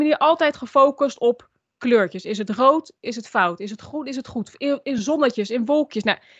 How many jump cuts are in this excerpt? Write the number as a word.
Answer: zero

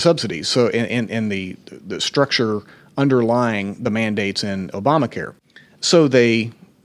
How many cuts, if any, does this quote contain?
zero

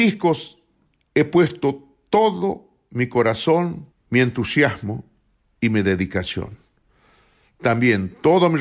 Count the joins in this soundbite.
one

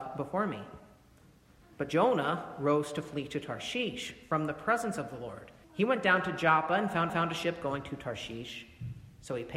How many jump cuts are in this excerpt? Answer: two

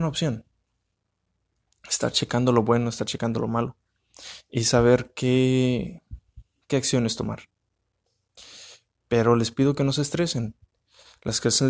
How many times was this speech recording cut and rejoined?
zero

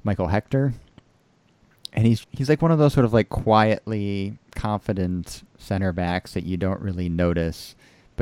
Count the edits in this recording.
one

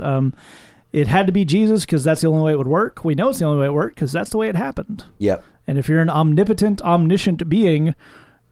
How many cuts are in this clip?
zero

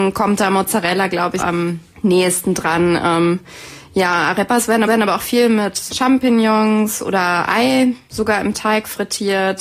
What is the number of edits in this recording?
four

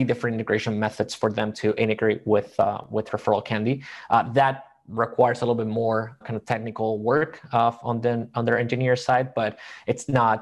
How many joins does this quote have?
one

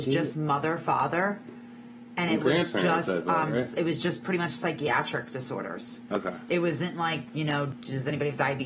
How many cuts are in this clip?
zero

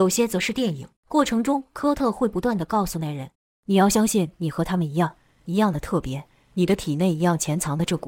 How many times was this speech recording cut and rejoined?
two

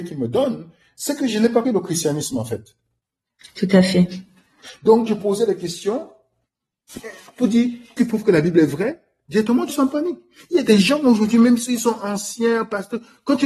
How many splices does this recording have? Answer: four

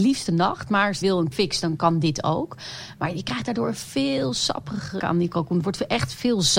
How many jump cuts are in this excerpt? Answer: four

